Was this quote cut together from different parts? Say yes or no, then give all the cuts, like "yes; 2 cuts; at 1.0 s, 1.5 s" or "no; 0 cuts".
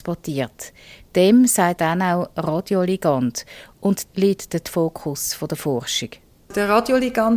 yes; 3 cuts; at 1.8 s, 4.1 s, 4.6 s